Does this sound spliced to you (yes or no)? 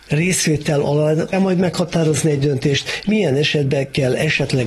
yes